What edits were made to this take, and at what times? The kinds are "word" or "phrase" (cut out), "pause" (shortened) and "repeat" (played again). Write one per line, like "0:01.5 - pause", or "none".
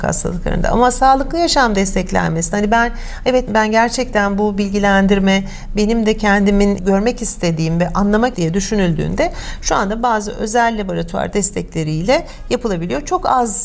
0:03.5 - word
0:06.8 - word
0:08.3 - phrase